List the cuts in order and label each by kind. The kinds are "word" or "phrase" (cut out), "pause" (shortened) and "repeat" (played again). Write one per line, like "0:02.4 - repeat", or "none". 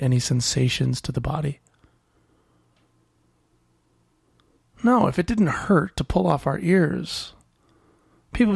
none